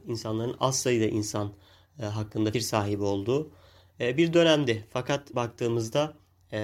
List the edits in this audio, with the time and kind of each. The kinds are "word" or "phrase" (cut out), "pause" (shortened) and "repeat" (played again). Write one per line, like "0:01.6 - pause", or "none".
0:02.5 - word
0:05.3 - word